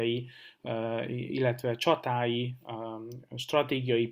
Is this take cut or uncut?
uncut